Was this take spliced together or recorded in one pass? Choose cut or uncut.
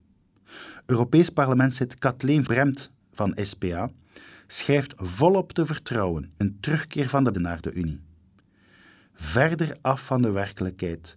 cut